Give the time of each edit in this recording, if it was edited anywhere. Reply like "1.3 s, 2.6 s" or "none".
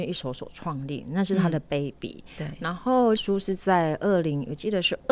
3.2 s